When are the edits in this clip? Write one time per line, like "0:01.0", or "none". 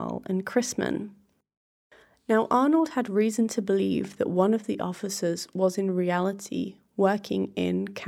none